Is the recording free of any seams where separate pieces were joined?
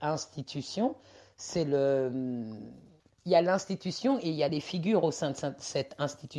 yes; 0 cuts

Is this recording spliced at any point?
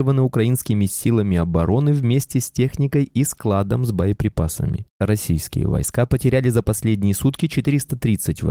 no; 0 cuts

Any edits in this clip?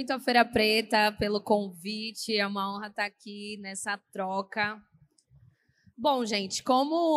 no; 0 cuts

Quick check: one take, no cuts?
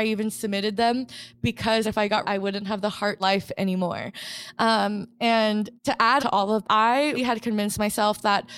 no; 7 cuts; at 1.8 s, 2.2 s, 3.2 s, 5.8 s, 6.2 s, 6.6 s, 7.2 s

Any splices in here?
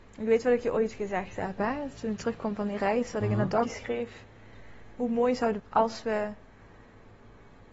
yes; 2 cuts; at 3.6 s, 5.6 s

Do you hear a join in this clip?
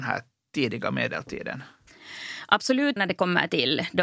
yes; 1 cut; at 3.0 s

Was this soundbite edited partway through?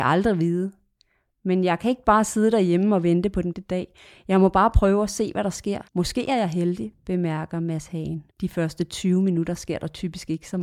yes; 3 cuts; at 3.5 s, 5.9 s, 8.3 s

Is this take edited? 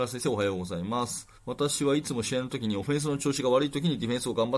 yes; 1 cut; at 1.4 s

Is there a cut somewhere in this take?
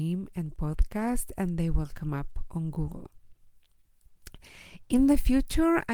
no; 0 cuts

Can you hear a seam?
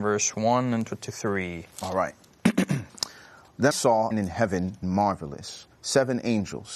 yes; 6 cuts; at 1.7 s, 2.9 s, 3.7 s, 4.1 s, 4.8 s, 5.7 s

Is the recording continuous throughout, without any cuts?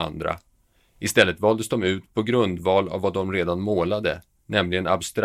yes; 0 cuts

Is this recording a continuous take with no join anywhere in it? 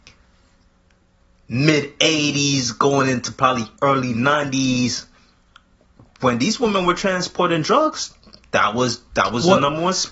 yes; 0 cuts

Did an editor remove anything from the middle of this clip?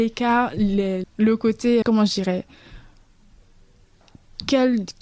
yes; 2 cuts; at 1.0 s, 1.8 s

